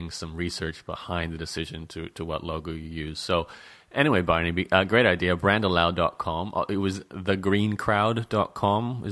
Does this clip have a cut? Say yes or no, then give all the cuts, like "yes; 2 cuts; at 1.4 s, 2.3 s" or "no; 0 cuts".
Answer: no; 0 cuts